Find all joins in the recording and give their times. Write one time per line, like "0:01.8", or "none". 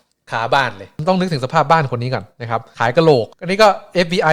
0:03.3